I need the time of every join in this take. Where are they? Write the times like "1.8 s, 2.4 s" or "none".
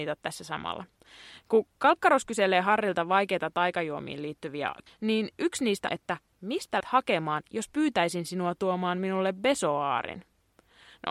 4.9 s, 5.9 s, 6.8 s